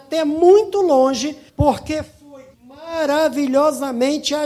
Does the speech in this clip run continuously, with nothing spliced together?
no; 2 cuts; at 1.5 s, 2.5 s

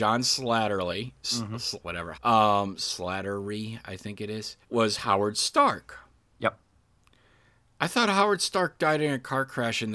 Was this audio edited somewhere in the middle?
yes; 3 cuts; at 1.8 s, 2.1 s, 4.6 s

